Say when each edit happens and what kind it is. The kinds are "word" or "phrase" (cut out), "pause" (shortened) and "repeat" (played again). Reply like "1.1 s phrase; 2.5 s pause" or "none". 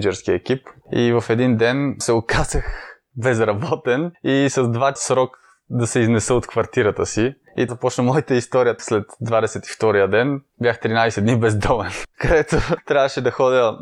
5.0 s word; 7.7 s word; 8.8 s word